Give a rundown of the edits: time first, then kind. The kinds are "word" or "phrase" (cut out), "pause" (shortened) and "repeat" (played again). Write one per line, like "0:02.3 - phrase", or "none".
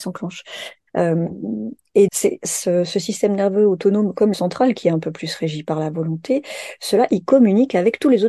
0:02.1 - word
0:04.3 - phrase